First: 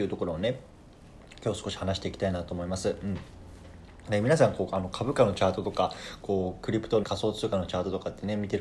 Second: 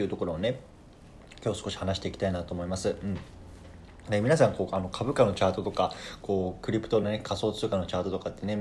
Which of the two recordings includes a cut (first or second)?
first